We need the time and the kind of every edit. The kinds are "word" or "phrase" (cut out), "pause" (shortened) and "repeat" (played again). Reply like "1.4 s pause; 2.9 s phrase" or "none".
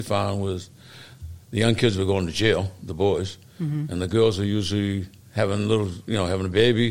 5.2 s pause